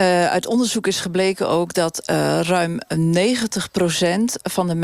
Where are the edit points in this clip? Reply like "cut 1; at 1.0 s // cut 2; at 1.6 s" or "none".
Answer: none